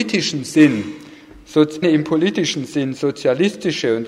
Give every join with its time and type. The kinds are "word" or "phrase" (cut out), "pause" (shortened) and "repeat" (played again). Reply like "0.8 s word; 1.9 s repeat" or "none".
1.8 s word